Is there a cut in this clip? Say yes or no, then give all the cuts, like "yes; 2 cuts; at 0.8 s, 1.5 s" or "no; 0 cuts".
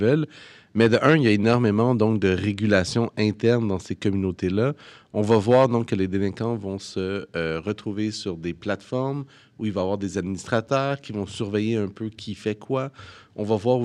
no; 0 cuts